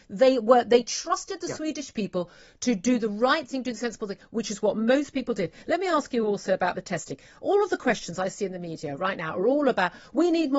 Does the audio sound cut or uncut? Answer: uncut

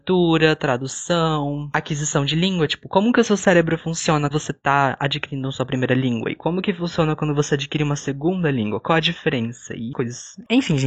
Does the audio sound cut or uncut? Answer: cut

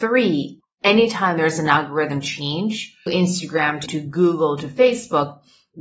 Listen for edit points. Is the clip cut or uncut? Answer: cut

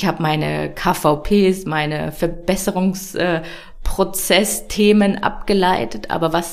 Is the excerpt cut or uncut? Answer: uncut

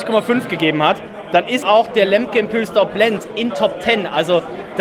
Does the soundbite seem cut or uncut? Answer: cut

